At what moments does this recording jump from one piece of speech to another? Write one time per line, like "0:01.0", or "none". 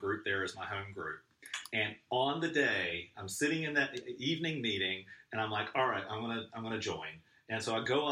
none

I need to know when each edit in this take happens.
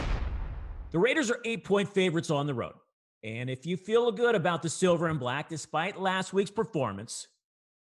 none

